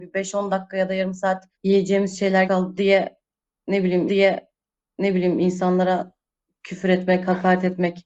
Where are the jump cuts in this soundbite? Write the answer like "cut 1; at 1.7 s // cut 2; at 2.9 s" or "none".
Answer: cut 1; at 1.5 s // cut 2; at 2.5 s // cut 3; at 4.1 s

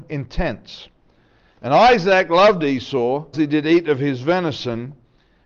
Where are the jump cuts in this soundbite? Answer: cut 1; at 3.3 s

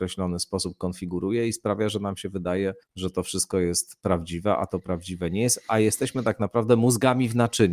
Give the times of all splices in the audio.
cut 1; at 2.8 s

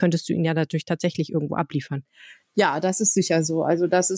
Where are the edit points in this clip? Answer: none

